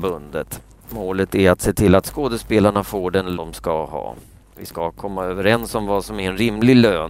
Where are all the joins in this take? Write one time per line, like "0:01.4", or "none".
0:03.4